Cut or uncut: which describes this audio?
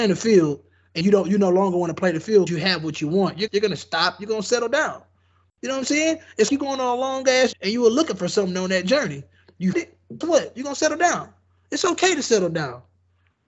cut